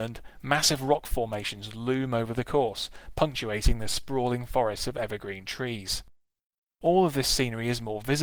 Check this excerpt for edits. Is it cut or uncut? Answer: uncut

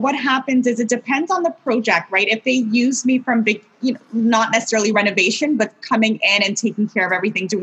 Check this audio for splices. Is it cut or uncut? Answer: uncut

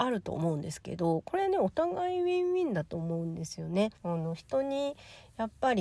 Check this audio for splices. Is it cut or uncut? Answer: cut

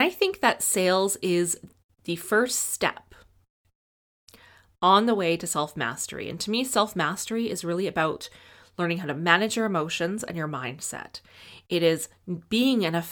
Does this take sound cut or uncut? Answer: uncut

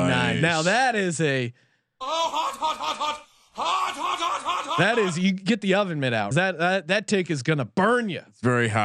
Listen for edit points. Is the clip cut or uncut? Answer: cut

